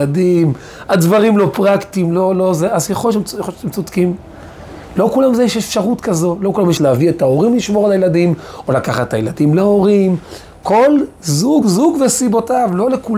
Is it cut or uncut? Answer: cut